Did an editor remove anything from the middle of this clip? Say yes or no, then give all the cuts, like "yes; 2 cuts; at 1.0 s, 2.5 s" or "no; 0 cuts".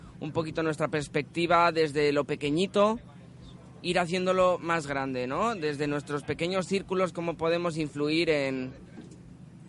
no; 0 cuts